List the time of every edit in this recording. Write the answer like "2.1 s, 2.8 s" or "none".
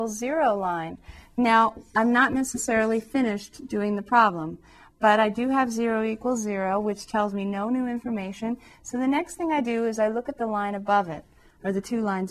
none